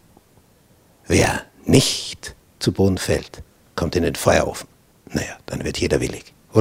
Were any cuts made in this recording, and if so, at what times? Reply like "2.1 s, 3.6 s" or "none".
none